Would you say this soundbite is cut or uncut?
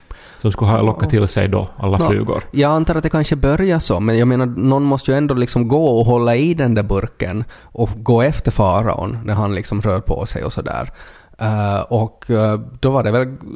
uncut